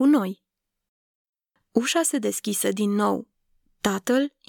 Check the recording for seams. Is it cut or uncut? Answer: uncut